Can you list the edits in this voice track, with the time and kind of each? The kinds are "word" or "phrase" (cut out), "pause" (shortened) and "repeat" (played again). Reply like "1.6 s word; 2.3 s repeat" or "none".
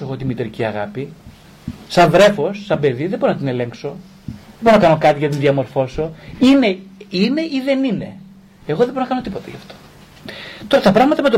none